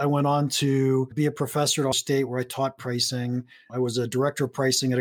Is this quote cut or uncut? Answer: cut